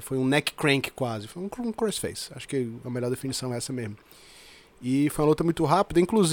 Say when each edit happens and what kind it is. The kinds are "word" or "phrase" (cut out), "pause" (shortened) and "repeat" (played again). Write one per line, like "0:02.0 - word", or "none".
none